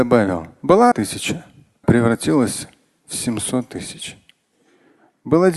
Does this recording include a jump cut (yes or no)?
yes